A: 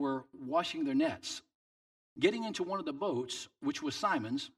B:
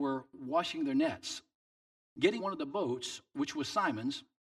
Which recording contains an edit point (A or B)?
B